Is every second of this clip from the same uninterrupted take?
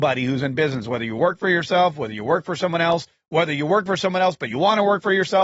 yes; 0 cuts

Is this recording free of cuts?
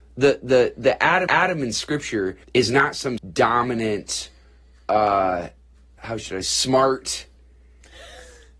no; 5 cuts; at 1.3 s, 2.4 s, 3.2 s, 6.0 s, 6.4 s

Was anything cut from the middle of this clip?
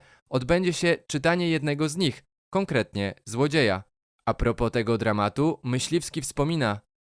no; 0 cuts

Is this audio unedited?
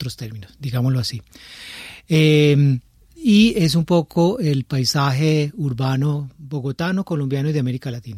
yes; 0 cuts

